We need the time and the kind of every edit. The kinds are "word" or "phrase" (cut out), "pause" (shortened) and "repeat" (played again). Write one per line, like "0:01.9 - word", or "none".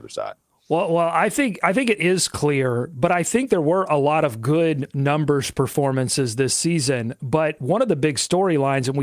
none